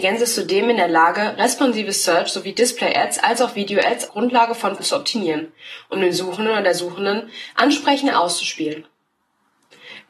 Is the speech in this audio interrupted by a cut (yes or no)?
yes